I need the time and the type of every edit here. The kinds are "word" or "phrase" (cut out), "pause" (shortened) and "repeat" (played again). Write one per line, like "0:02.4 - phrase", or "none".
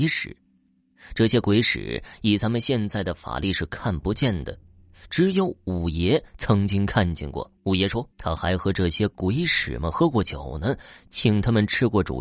0:07.6 - pause
0:08.1 - pause